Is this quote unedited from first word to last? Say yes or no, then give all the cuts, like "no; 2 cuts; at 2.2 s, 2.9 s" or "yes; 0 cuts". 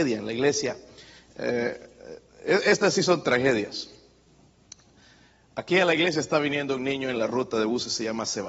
yes; 0 cuts